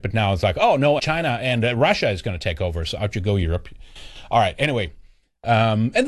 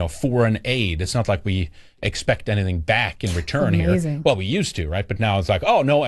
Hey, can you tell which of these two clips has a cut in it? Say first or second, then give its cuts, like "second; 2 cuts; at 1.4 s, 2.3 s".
first; 1 cut; at 1.0 s